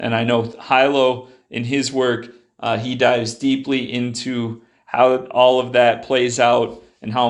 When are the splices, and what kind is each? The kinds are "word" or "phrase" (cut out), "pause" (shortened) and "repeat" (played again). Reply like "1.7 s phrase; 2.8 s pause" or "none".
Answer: none